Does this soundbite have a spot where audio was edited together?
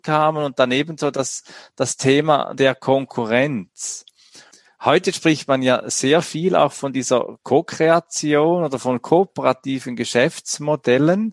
no; 0 cuts

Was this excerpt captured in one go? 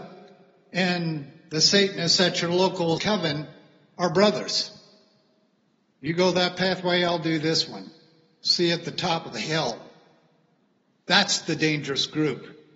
no; 1 cut; at 3.0 s

